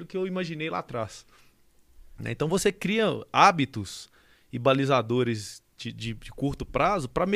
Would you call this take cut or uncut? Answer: uncut